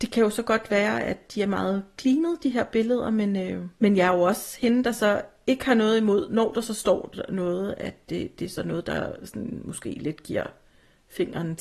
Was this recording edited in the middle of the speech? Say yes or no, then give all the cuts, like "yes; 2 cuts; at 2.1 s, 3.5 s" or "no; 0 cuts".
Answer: yes; 1 cut; at 3.7 s